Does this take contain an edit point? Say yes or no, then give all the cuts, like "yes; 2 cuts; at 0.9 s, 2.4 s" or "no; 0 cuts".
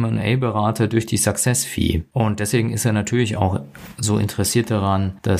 no; 0 cuts